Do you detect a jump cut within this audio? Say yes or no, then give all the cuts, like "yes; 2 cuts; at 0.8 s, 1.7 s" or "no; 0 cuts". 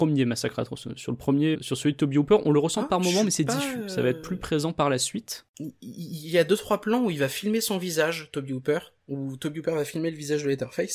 yes; 1 cut; at 1.5 s